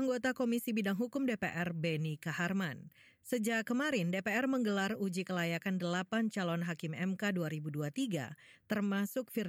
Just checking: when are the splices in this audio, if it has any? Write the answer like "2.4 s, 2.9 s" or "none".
none